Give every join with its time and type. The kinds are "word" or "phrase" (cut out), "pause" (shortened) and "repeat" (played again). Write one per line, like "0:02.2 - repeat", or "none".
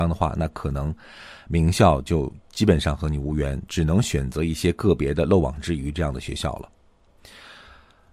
none